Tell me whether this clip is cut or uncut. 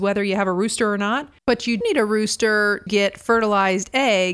cut